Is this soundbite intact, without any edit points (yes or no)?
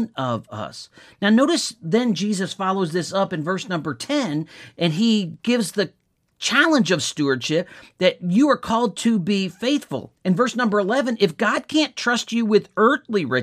yes